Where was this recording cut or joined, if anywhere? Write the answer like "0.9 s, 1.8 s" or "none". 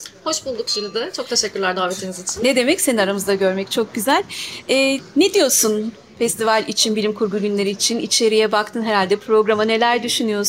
none